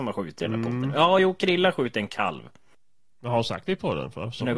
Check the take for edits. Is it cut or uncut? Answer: uncut